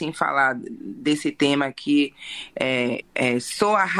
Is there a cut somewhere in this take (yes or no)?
yes